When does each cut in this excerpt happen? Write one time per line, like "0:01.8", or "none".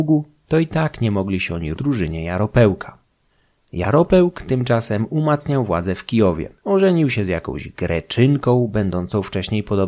0:01.7
0:03.3
0:06.6